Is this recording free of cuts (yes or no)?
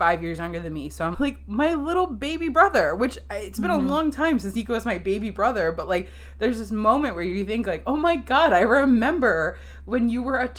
no